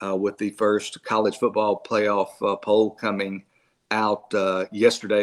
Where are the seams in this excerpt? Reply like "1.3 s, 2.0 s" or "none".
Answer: none